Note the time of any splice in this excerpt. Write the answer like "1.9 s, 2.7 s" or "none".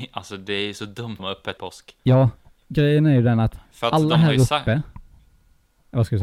1.2 s, 1.6 s, 2.0 s, 3.7 s